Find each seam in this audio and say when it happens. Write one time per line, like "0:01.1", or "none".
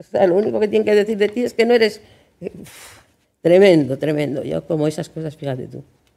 0:03.2